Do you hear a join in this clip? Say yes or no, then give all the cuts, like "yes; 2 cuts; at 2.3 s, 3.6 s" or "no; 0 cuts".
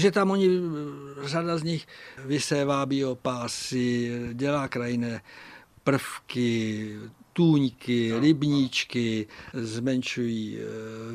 no; 0 cuts